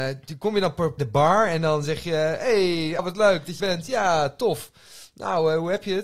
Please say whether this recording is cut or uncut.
cut